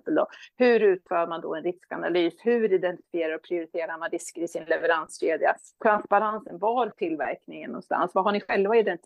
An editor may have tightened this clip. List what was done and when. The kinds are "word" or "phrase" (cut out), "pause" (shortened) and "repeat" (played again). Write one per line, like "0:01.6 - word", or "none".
0:06.9 - word

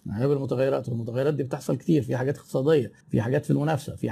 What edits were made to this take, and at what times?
0:03.0 - pause

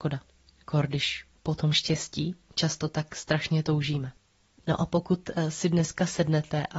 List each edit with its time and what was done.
0:01.4 - pause
0:04.4 - pause

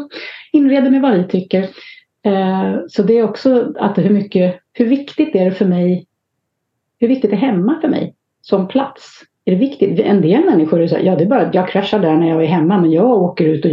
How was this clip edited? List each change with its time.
none

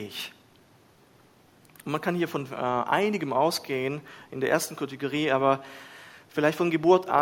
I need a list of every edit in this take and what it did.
none

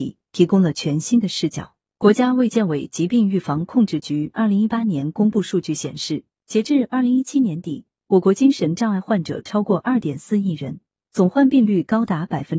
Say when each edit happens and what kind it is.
0:06.4 - pause

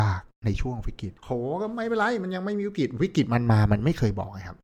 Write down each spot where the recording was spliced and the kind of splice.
0:01.2 - pause

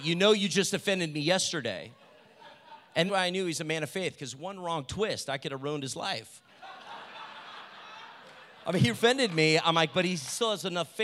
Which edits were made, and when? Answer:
0:03.1 - word
0:08.9 - word

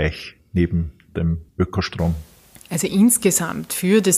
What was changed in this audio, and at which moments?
0:01.5 - pause

